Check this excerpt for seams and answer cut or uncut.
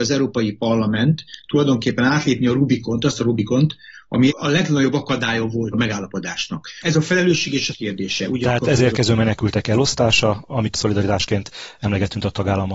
cut